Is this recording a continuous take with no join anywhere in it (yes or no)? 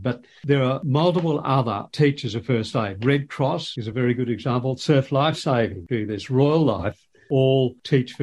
yes